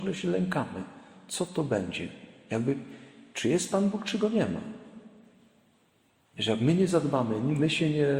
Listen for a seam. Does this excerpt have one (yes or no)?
no